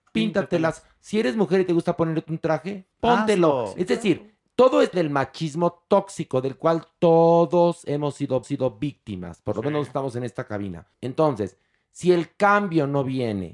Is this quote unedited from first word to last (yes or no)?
no